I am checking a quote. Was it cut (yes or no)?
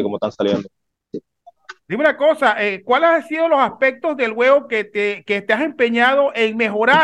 yes